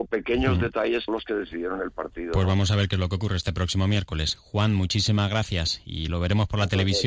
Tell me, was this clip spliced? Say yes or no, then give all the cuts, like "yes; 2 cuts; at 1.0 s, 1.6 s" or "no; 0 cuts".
yes; 1 cut; at 1.1 s